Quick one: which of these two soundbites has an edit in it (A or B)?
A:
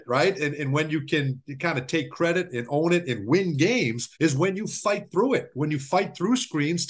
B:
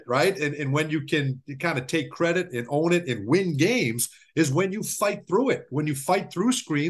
A